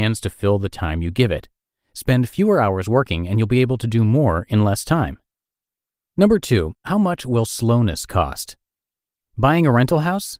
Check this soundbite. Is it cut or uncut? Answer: uncut